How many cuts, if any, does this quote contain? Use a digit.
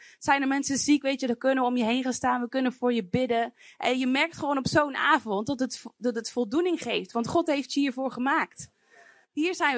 0